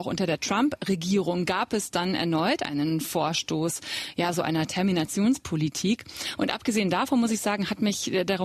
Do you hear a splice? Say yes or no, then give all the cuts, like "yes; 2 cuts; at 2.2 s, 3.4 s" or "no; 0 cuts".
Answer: no; 0 cuts